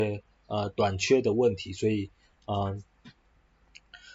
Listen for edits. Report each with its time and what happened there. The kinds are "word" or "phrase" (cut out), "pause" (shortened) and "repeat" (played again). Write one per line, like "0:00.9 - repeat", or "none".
none